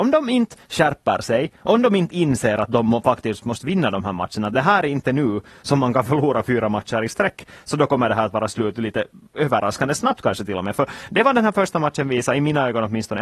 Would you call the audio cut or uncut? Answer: uncut